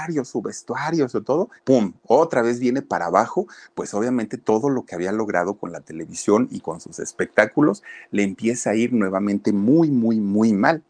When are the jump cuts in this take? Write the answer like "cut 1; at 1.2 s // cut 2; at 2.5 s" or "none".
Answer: cut 1; at 1.6 s